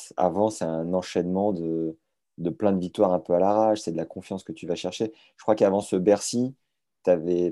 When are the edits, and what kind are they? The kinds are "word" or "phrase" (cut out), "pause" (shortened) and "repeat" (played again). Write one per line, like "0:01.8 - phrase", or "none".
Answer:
none